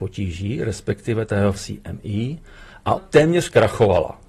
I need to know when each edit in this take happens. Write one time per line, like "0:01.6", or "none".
0:01.6
0:03.0